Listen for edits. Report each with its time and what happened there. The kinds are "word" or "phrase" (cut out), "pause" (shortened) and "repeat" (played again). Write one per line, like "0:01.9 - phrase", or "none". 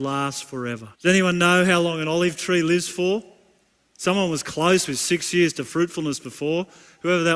0:01.0 - pause